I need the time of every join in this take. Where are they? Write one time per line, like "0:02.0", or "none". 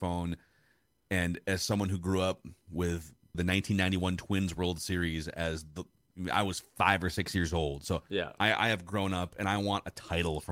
0:03.3

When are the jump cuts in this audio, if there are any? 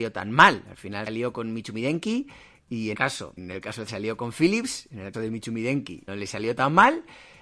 0:01.1
0:02.9
0:03.4
0:03.9
0:05.1
0:06.1

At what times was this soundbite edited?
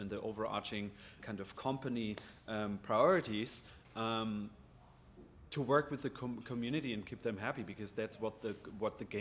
0:01.2

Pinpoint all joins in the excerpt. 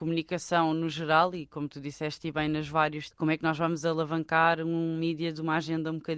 0:03.1

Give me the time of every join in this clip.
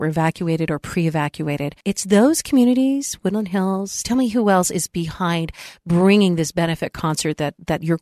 0:01.8

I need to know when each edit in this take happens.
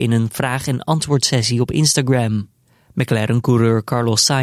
none

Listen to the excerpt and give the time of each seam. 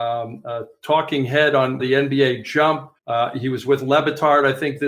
0:01.8
0:03.0

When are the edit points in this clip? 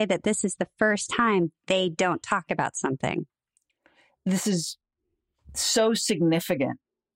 none

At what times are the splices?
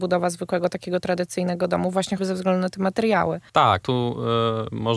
0:02.2
0:03.8

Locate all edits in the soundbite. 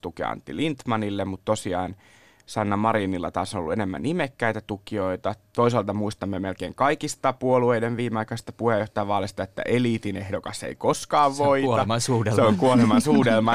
none

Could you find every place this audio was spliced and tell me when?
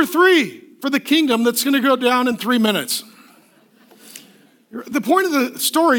none

